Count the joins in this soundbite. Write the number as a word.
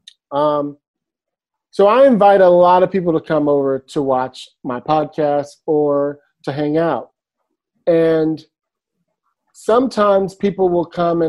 zero